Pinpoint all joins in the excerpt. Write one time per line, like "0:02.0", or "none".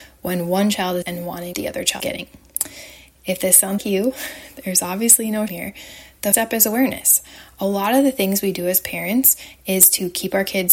0:01.0
0:01.5
0:02.0
0:03.8
0:05.5
0:06.3